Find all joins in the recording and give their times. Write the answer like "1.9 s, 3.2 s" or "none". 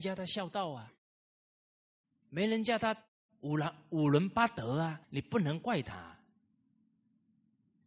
5.0 s